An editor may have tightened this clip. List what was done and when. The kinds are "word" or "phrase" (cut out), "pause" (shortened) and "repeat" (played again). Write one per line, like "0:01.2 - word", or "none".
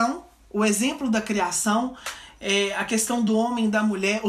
none

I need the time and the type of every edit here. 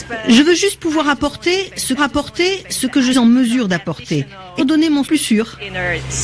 0:02.0 - repeat
0:03.1 - word
0:04.6 - word
0:05.0 - phrase

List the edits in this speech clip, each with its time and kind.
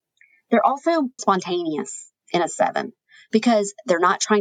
0:01.2 - word
0:02.2 - pause

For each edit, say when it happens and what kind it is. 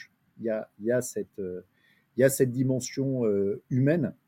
none

